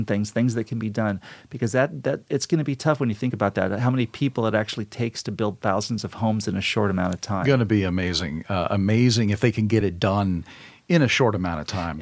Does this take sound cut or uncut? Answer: uncut